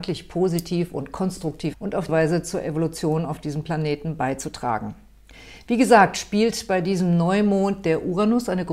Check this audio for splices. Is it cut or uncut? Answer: cut